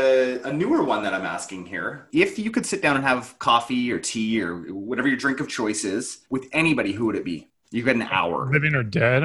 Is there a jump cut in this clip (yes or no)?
no